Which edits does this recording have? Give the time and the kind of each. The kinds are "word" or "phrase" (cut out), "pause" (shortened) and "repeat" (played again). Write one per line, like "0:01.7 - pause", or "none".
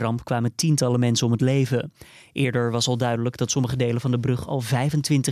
none

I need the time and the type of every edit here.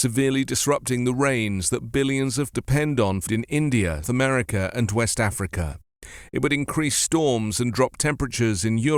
0:02.5 - word
0:03.3 - word
0:04.0 - word

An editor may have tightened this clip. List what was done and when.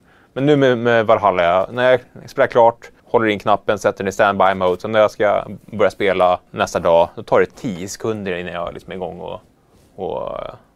0:03.0 - pause
0:06.5 - pause

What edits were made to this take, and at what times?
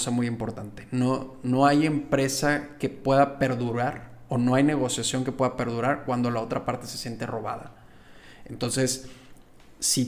none

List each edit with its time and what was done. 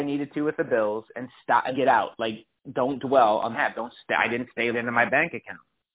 0:01.7 - word
0:03.5 - phrase
0:04.7 - word

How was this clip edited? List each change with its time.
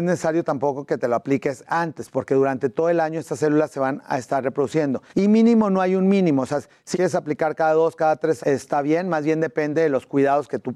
0:05.1 - pause
0:06.9 - word
0:08.4 - word

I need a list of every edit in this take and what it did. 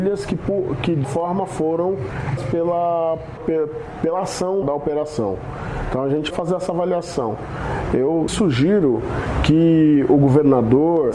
0:01.0 - word
0:02.4 - word
0:03.4 - word
0:04.6 - word
0:06.3 - word
0:08.3 - word

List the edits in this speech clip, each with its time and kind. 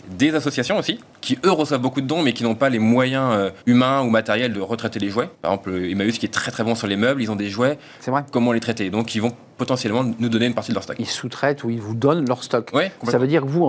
0:03.6 - pause
0:05.3 - pause

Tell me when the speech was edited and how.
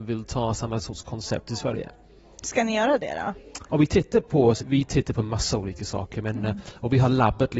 0:04.6 - word

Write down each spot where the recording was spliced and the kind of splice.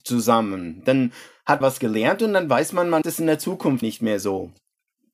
0:01.6 - word
0:03.0 - word
0:03.8 - word

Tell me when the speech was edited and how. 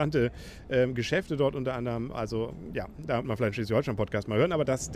0:03.2 - word

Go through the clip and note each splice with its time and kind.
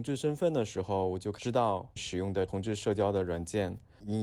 0:02.0 - word

